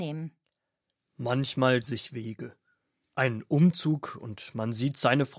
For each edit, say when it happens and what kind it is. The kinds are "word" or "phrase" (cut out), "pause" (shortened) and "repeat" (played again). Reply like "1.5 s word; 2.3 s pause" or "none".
1.8 s word